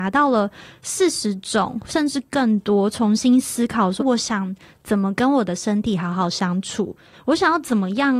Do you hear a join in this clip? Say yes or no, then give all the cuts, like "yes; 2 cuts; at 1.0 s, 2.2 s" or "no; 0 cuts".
yes; 1 cut; at 4.0 s